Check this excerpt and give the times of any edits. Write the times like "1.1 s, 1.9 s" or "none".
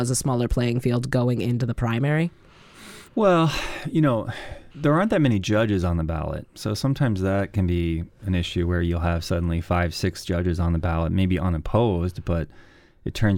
3.1 s, 4.7 s